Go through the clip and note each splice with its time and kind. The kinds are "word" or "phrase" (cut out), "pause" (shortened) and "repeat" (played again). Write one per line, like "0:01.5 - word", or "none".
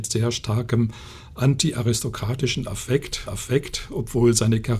0:03.3 - repeat